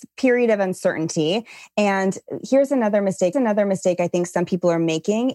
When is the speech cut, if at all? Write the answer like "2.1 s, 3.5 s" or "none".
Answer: 3.3 s